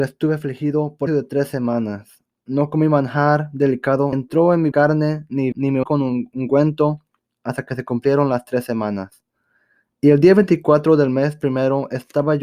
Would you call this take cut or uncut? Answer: cut